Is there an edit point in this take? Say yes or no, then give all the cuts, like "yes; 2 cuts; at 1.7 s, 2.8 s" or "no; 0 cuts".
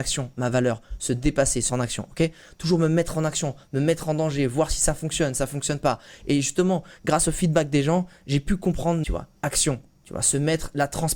yes; 3 cuts; at 1.7 s, 9.0 s, 9.4 s